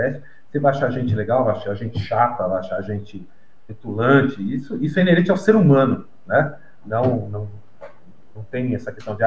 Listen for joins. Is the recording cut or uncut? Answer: uncut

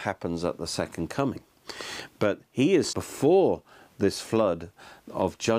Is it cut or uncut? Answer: cut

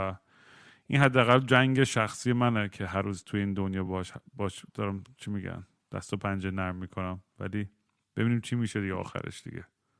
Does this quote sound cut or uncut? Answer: uncut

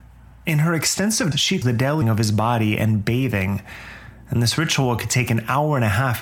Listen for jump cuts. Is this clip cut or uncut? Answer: cut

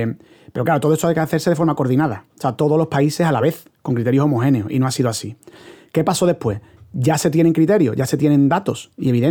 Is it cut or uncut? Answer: uncut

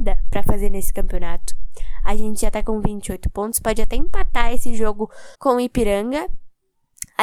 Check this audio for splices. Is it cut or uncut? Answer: cut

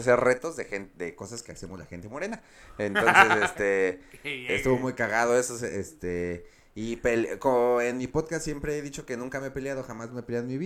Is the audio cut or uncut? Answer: uncut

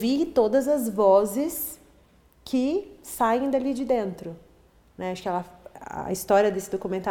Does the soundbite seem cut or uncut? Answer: uncut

